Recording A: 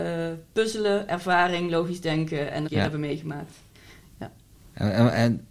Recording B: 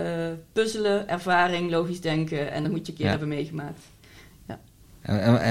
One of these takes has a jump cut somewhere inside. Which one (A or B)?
A